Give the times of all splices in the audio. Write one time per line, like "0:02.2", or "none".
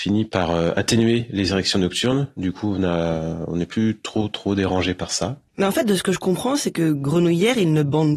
0:05.5

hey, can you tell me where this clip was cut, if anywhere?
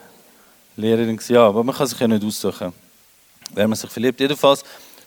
none

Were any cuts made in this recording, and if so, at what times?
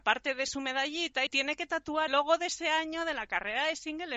0:01.3
0:02.1

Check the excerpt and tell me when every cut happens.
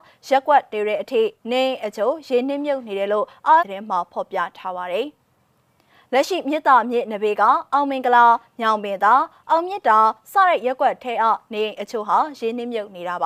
0:03.6

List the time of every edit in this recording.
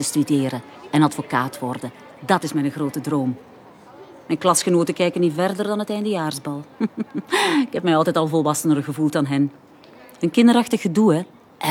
none

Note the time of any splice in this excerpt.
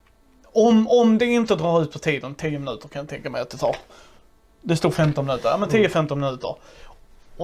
none

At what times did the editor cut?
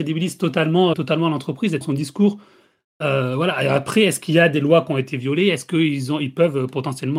0:00.9
0:01.8

